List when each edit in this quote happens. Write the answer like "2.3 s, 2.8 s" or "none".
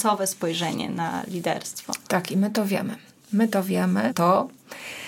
4.1 s